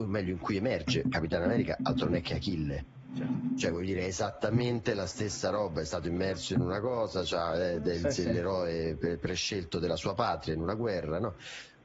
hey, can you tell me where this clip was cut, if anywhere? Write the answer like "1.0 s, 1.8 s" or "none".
none